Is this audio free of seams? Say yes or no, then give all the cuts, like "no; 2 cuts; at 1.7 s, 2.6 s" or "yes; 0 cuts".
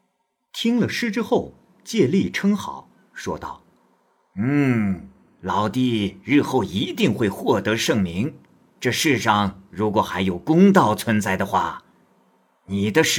yes; 0 cuts